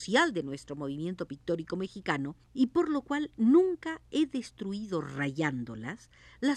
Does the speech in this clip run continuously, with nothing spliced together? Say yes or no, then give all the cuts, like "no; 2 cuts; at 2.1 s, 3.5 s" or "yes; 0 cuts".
no; 1 cut; at 2.4 s